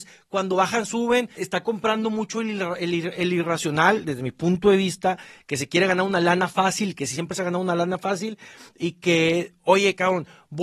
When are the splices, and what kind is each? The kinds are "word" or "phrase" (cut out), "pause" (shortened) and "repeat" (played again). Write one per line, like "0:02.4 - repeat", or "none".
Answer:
0:01.4 - word

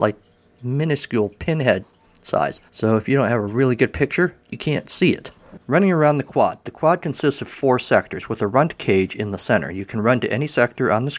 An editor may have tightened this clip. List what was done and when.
0:02.7 - pause
0:04.4 - pause

